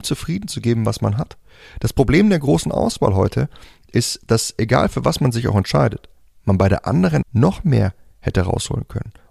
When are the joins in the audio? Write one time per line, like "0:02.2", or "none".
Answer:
0:07.2